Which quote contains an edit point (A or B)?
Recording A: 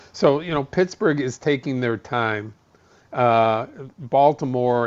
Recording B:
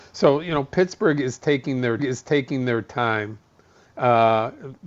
B